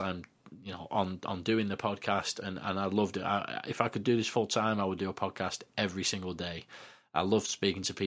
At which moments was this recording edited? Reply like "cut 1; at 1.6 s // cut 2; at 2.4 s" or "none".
none